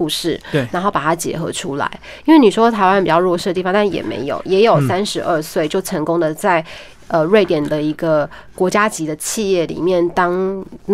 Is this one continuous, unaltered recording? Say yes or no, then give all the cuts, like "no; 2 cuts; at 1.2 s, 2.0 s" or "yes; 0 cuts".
yes; 0 cuts